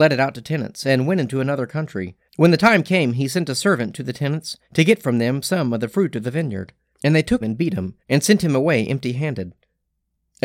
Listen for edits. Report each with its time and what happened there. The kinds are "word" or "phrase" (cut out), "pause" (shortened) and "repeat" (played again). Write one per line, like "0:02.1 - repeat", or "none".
0:02.3 - pause
0:04.6 - pause
0:06.9 - pause
0:07.4 - word
0:08.0 - pause